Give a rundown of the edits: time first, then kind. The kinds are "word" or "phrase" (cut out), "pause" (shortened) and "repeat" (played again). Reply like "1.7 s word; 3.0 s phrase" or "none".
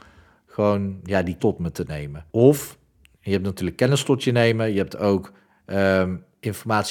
1.4 s word; 2.3 s pause